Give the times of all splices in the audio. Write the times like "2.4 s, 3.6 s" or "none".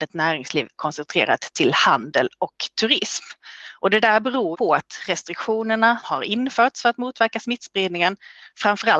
4.5 s, 6.0 s